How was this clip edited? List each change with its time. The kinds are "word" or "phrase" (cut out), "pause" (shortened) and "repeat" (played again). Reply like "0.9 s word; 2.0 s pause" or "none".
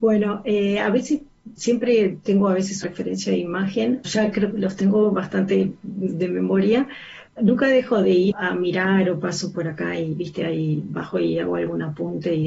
1.6 s word; 2.8 s word; 4.0 s word; 4.5 s word; 7.4 s word; 8.3 s word